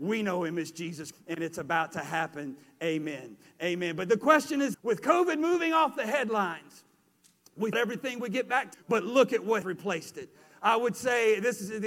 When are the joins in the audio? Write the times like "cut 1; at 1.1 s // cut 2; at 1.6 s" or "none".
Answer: cut 1; at 1.1 s // cut 2; at 4.7 s // cut 3; at 7.7 s // cut 4; at 8.7 s // cut 5; at 9.6 s